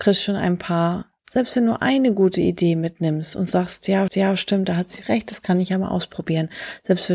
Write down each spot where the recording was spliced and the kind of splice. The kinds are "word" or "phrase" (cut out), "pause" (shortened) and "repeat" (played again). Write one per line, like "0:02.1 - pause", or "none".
0:01.2 - pause
0:04.1 - repeat
0:05.0 - word